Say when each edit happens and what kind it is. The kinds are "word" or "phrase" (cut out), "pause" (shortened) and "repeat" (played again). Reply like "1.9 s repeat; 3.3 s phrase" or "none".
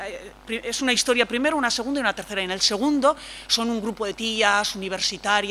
none